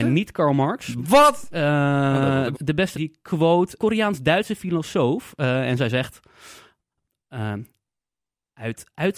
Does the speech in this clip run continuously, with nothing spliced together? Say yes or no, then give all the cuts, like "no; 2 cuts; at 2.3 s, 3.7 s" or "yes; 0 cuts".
no; 3 cuts; at 2.5 s, 2.9 s, 3.8 s